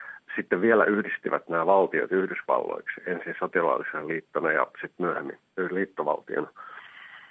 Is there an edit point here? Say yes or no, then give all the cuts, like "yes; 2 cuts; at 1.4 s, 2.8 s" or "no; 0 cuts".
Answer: no; 0 cuts